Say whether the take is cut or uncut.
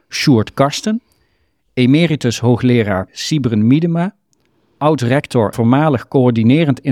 cut